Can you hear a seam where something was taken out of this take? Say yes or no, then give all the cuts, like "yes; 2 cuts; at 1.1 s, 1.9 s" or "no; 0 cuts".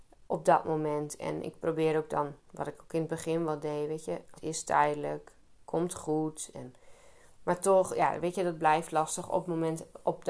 yes; 2 cuts; at 2.4 s, 4.4 s